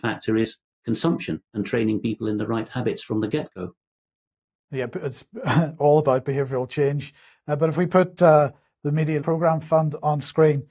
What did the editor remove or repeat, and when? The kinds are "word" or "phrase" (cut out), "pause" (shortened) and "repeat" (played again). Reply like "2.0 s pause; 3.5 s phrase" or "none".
9.2 s word